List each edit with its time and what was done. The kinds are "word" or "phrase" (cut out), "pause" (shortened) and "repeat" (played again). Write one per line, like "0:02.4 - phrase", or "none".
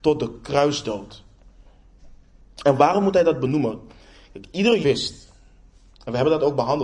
0:04.8 - word